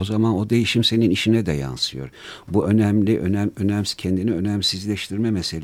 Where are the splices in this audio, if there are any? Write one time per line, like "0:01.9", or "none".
none

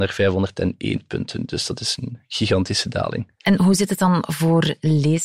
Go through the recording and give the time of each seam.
none

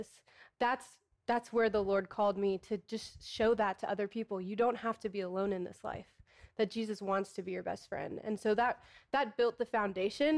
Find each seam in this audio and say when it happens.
none

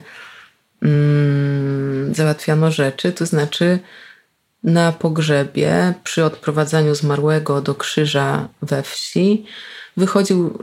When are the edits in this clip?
none

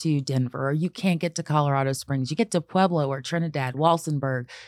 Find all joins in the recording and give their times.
0:02.4

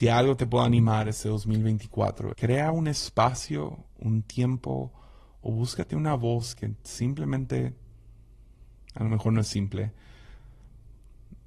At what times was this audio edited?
0:02.3

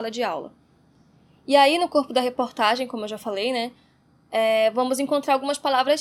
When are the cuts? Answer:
none

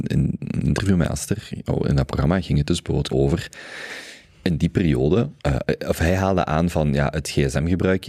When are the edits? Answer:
0:03.1
0:05.4

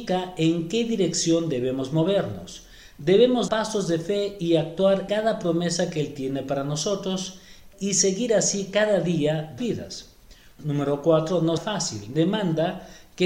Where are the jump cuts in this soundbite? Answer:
0:03.5
0:05.1
0:09.6
0:11.6

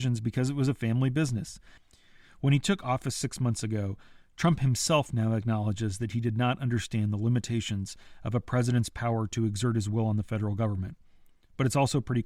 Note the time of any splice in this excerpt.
none

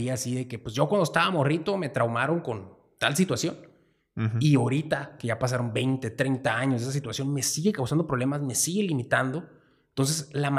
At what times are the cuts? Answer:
none

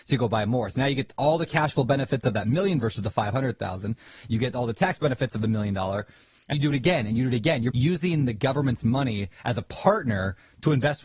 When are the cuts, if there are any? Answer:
0:02.8
0:06.5
0:07.7

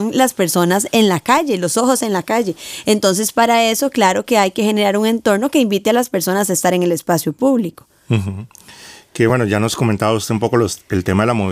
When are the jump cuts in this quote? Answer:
none

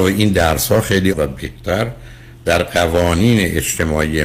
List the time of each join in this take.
0:01.1

